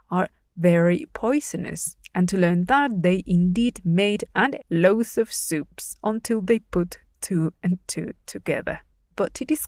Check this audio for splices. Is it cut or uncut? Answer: cut